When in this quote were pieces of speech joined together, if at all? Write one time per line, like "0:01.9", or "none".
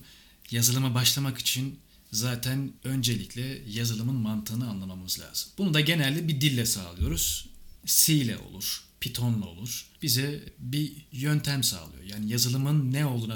0:02.8
0:05.5
0:09.9
0:11.1